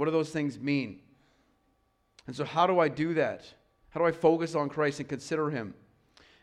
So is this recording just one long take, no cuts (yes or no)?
yes